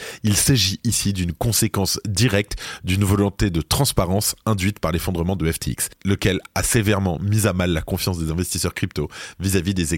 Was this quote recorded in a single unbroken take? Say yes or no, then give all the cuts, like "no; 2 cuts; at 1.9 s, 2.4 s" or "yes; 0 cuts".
yes; 0 cuts